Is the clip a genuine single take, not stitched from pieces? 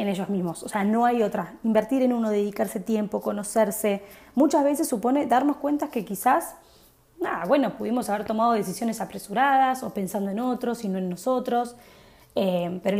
yes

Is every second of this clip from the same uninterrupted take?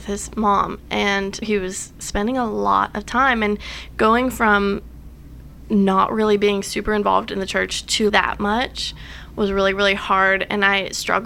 no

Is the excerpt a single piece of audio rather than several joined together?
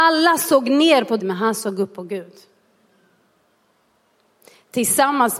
no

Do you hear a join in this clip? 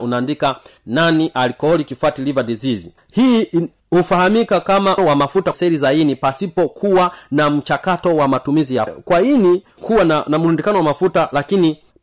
yes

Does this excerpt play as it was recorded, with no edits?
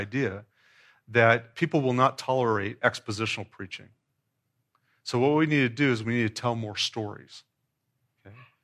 yes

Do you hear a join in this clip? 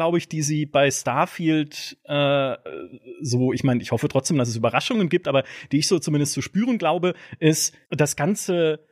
yes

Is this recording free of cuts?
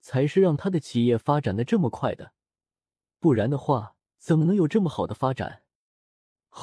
no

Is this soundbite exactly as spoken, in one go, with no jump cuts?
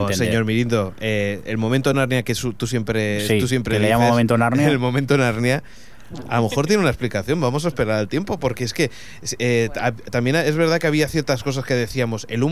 yes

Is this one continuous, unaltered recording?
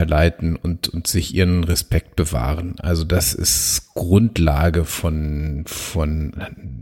yes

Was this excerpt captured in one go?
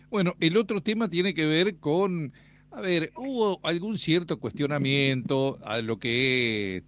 yes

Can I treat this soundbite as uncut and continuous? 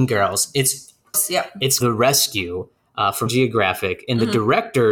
no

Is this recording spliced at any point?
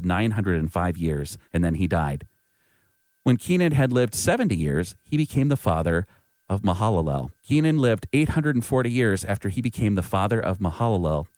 yes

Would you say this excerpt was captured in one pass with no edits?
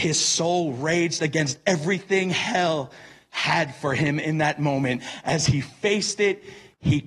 yes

